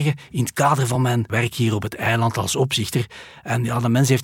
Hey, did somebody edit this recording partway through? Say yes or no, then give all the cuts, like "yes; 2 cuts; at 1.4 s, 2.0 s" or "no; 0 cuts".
no; 0 cuts